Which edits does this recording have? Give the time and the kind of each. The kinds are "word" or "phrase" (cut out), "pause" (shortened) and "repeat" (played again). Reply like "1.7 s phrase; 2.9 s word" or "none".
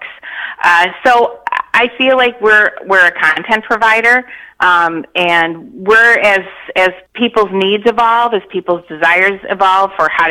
7.1 s pause